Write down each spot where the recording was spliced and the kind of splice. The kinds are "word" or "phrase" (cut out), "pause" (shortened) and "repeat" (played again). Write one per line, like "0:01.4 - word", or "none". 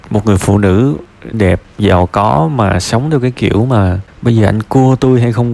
0:01.3 - word